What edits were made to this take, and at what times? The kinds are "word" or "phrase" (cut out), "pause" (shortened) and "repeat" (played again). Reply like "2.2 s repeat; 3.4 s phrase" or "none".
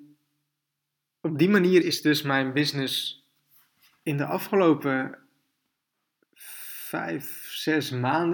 1.8 s word